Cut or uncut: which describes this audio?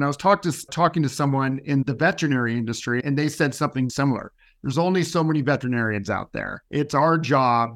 cut